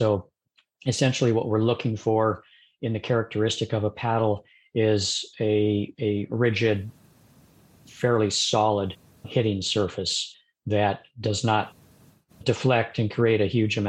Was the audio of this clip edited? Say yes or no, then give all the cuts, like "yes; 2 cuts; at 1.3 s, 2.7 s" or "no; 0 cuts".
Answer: no; 0 cuts